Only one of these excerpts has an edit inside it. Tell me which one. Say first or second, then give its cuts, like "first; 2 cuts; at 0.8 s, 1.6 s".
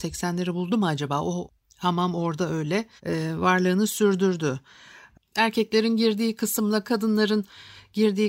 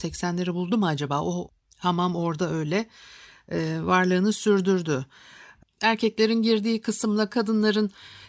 first; 1 cut; at 3.0 s